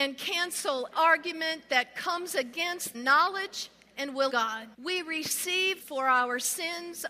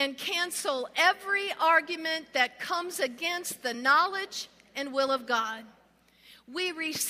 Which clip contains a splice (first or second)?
first